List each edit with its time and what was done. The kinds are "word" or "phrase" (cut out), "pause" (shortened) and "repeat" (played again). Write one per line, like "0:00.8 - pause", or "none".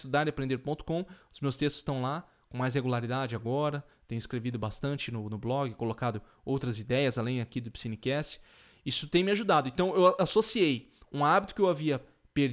none